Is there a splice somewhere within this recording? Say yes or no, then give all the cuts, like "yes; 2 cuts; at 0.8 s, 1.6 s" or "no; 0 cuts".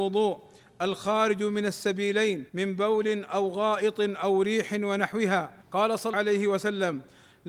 yes; 3 cuts; at 2.5 s, 5.6 s, 6.1 s